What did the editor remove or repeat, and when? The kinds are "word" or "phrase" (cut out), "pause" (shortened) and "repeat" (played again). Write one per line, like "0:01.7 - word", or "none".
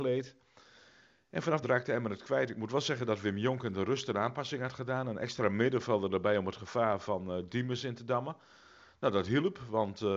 0:01.6 - phrase

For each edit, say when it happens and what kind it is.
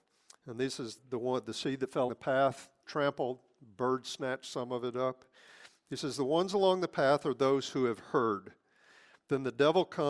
0:01.0 - word
0:02.1 - word
0:02.8 - word

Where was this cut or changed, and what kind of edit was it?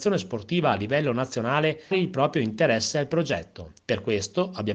0:01.9 - word
0:03.8 - pause

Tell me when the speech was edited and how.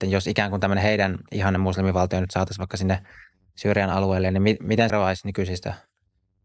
0:04.9 - word

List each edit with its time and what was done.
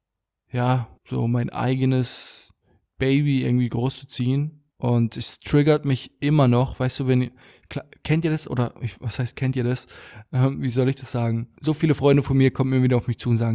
0:01.0 - pause
0:04.7 - pause
0:11.6 - pause

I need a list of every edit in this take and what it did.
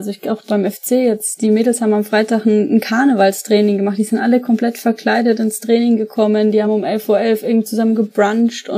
none

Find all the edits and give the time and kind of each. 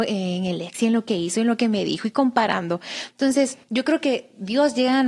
0:03.6 - pause

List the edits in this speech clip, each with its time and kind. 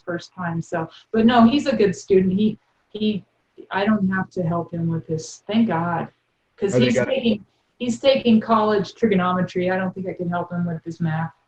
none

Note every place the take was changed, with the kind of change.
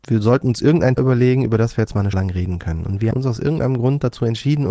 0:01.0 - word
0:02.1 - word
0:03.1 - word

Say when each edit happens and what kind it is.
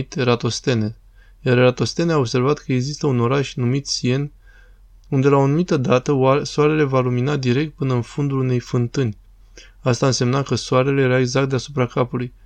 none

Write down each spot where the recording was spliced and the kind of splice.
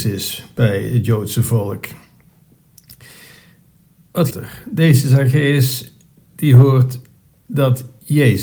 0:04.3 - word

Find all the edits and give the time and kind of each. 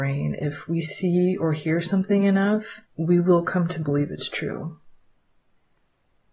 0:02.9 - pause

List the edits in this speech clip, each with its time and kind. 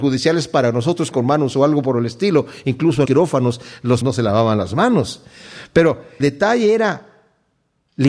0:01.1 - word
0:01.5 - word
0:03.1 - word
0:04.0 - word
0:06.2 - word

